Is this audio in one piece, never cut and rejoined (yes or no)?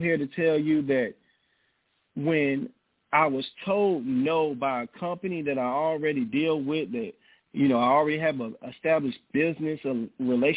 yes